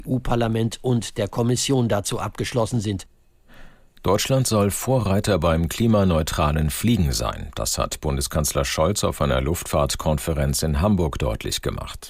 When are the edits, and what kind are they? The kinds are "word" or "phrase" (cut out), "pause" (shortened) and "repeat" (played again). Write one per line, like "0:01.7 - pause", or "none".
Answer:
none